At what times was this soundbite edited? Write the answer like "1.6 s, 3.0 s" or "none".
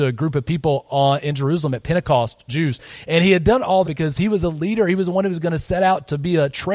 2.5 s, 3.8 s